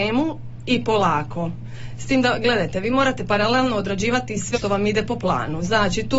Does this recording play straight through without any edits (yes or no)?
no